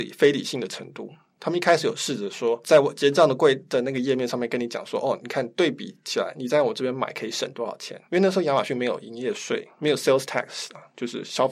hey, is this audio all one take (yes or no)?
yes